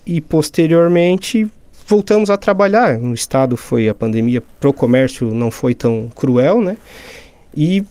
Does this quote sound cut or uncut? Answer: uncut